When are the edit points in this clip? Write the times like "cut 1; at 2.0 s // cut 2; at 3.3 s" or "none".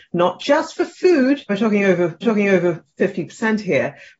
cut 1; at 1.5 s // cut 2; at 2.2 s